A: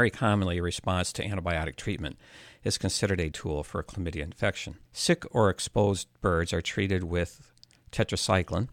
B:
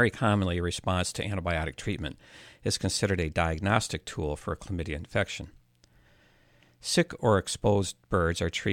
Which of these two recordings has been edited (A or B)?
A